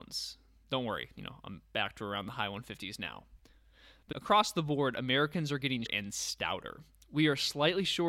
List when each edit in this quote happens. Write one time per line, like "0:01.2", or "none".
0:04.1
0:05.9